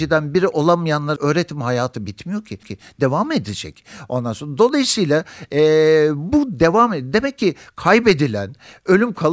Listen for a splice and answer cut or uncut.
cut